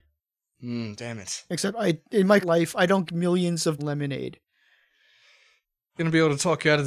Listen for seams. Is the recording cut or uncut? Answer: cut